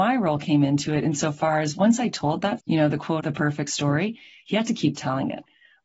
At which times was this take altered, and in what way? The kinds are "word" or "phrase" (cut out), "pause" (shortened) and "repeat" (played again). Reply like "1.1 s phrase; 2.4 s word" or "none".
2.6 s word; 3.2 s word